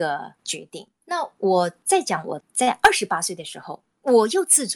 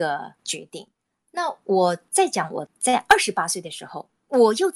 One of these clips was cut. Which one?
first; 1 cut; at 0.9 s

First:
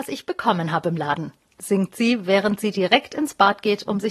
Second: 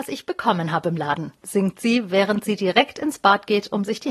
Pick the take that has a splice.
second; 1 cut; at 1.4 s

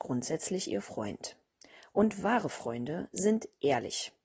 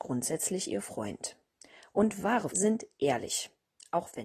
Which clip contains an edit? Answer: second; 1 cut; at 2.5 s

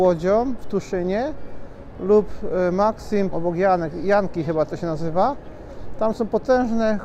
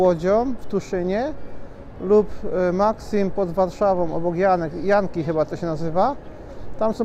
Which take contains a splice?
first; 1 cut; at 3.3 s

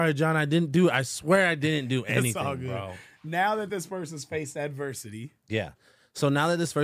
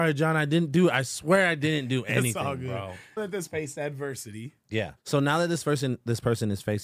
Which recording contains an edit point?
second; 3 cuts; at 3.2 s, 3.5 s, 5.0 s

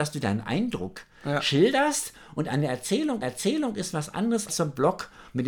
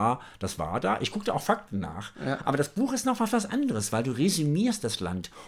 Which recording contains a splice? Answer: first; 2 cuts; at 3.2 s, 4.5 s

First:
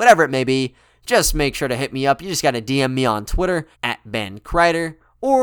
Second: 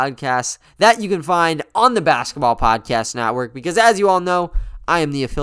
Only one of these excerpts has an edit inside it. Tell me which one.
first; 1 cut; at 3.7 s

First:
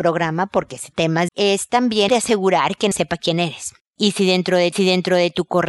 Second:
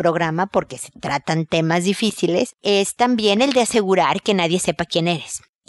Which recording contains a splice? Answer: first; 5 cuts; at 0.9 s, 1.3 s, 2.1 s, 2.9 s, 4.7 s

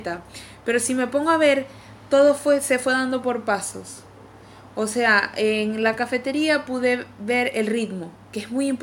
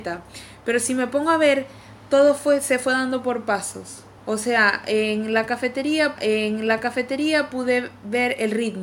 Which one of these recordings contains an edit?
second; 2 cuts; at 4.2 s, 6.2 s

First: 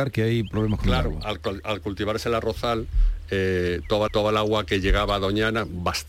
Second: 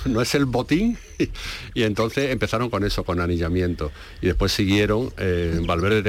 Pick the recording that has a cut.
first; 1 cut; at 4.1 s

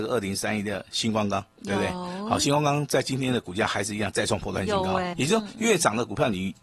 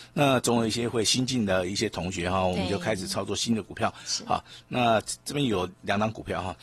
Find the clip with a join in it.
first; 1 cut; at 5.1 s

